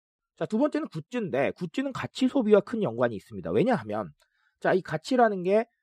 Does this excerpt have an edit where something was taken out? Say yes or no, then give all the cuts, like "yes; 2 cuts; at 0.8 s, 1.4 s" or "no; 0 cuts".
no; 0 cuts